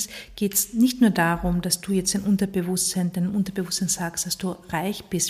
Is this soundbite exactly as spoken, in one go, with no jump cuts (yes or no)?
yes